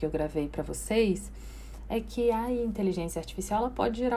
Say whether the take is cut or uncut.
uncut